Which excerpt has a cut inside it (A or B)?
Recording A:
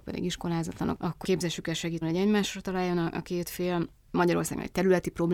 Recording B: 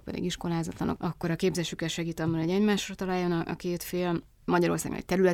A